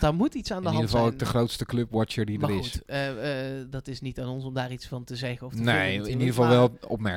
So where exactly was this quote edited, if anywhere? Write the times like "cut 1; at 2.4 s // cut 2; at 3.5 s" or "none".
none